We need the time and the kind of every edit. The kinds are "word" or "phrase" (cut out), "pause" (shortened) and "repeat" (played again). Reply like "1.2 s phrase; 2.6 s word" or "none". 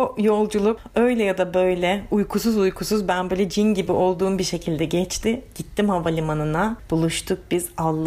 none